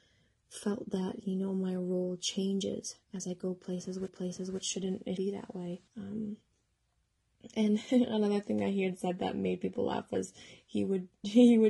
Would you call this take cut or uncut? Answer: cut